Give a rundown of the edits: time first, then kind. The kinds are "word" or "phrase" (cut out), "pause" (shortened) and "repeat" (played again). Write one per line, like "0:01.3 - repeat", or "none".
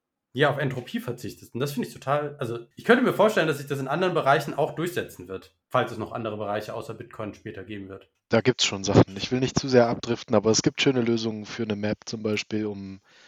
0:02.7 - pause
0:05.6 - pause
0:08.1 - pause

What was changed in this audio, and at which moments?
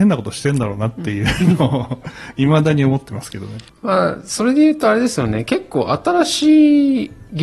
0:03.7 - pause

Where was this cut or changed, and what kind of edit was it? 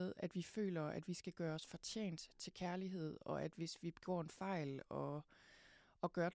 none

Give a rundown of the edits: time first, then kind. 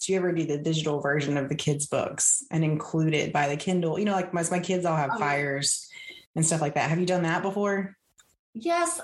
0:03.3 - phrase
0:06.3 - pause

